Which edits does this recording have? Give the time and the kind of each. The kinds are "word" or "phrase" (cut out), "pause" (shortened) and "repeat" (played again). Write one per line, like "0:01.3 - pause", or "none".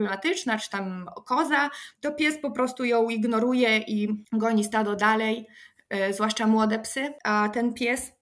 0:01.9 - pause